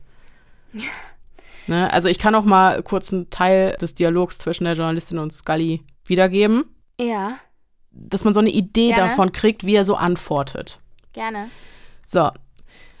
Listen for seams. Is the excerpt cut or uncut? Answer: uncut